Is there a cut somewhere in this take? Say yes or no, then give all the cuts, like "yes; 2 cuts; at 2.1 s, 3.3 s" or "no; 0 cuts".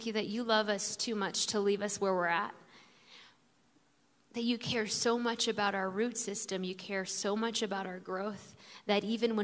no; 0 cuts